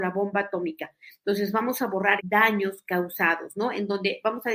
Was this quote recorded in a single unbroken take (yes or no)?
no